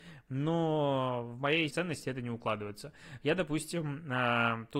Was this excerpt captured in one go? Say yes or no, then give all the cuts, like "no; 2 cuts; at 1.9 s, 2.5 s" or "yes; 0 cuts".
no; 1 cut; at 1.7 s